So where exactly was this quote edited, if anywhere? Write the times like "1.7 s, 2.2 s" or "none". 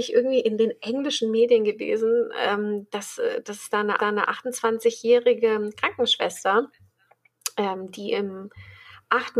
4.0 s